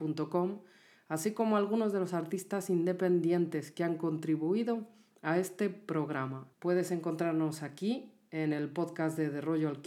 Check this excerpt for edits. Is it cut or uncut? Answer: cut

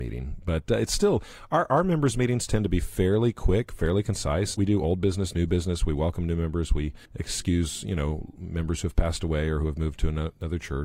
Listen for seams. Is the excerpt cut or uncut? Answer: cut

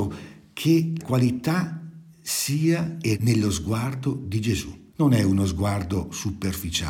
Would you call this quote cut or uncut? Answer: cut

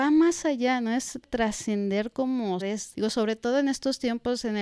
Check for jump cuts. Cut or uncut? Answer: cut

